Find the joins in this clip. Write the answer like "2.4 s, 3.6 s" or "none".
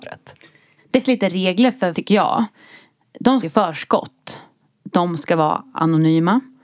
1.0 s, 1.9 s, 3.4 s